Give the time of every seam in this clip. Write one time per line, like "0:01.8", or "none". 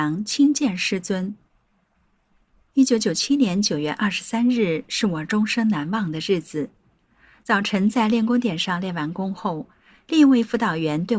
none